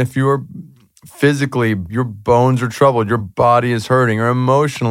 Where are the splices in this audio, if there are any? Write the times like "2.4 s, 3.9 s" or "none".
none